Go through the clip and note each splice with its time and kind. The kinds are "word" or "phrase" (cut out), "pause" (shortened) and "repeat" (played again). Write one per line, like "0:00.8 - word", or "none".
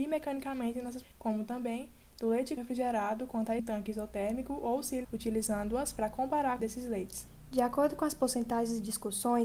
0:01.0 - word
0:02.6 - word
0:03.6 - word
0:05.0 - word
0:06.6 - word

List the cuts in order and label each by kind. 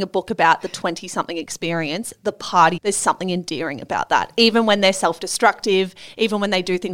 0:02.8 - word

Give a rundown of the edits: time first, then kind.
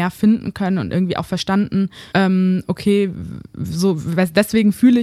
0:02.1 - pause

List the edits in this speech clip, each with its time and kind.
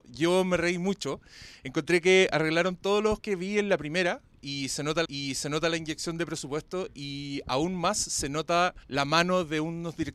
0:03.2 - word
0:05.0 - repeat
0:08.8 - pause

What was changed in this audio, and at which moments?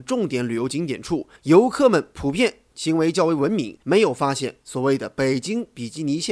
0:01.4 - pause
0:03.8 - pause

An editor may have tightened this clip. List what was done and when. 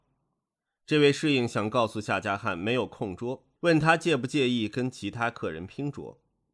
0:03.6 - pause

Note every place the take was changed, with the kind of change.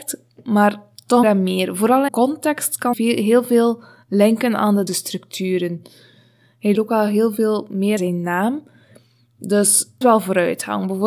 0:01.2 - word
0:02.1 - word
0:02.9 - word
0:04.9 - word
0:06.7 - word
0:08.0 - word
0:10.0 - word

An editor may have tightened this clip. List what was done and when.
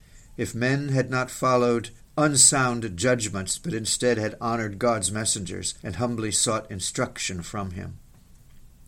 0:02.0 - pause
0:05.8 - pause

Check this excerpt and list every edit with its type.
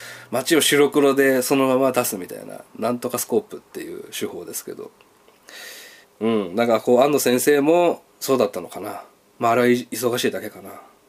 0:06.0 - pause
0:09.2 - pause

